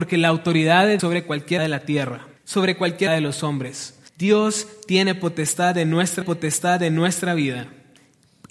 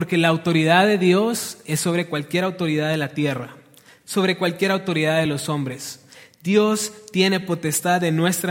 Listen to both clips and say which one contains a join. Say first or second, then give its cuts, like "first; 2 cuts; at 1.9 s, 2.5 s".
first; 6 cuts; at 1.0 s, 1.6 s, 2.4 s, 3.1 s, 4.1 s, 6.2 s